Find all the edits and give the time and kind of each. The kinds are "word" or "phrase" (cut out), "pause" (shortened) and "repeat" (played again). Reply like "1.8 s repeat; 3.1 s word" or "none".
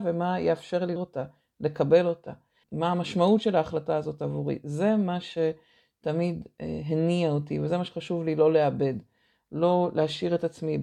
1.0 s word; 2.6 s word

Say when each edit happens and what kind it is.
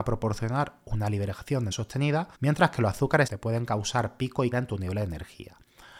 1.7 s word; 2.3 s pause; 3.3 s word; 4.5 s word

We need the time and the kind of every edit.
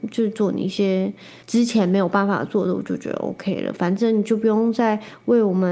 1.4 s pause

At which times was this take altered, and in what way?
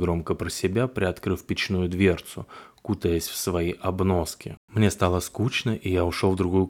4.6 s pause

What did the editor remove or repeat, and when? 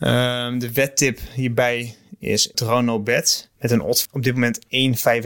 2.5 s word; 3.5 s pause; 4.0 s word

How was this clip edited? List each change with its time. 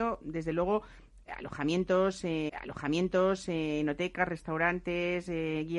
2.5 s repeat

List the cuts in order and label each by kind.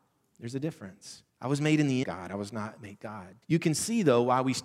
1.3 s pause; 2.0 s phrase; 3.4 s pause

